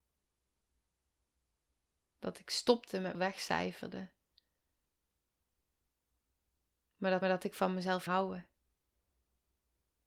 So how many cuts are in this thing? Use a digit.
3